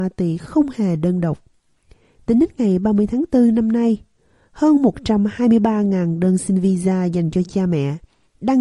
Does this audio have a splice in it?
no; 0 cuts

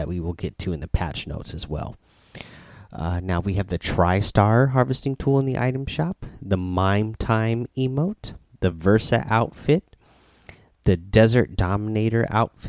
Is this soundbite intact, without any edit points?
yes; 0 cuts

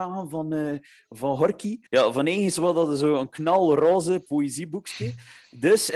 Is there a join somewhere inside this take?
yes; 1 cut; at 1.9 s

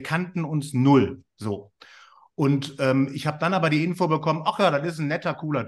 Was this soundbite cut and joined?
no; 0 cuts

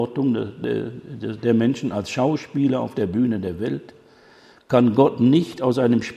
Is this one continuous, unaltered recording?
yes; 0 cuts

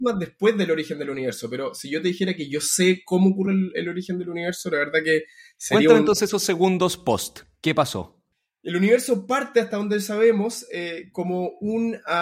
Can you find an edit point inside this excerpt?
no; 0 cuts

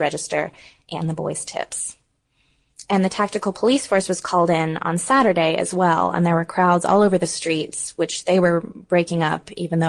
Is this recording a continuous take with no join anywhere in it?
yes; 0 cuts

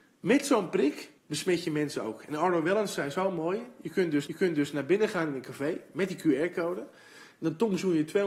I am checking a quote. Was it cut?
yes; 2 cuts; at 1.2 s, 4.3 s

